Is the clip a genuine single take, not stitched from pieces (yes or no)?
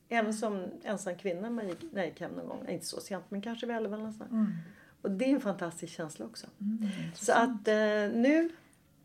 yes